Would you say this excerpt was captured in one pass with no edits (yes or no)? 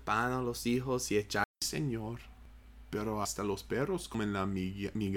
no